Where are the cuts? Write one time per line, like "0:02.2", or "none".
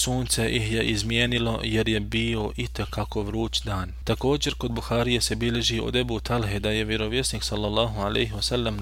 none